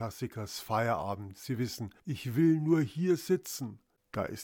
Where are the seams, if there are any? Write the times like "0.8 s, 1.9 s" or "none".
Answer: 2.0 s